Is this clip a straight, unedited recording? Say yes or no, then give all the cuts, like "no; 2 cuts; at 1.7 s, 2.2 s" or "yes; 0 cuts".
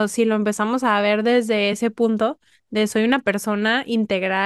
yes; 0 cuts